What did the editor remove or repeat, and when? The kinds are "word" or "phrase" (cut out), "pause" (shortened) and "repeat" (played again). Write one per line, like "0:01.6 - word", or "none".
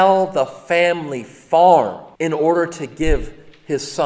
0:02.2 - pause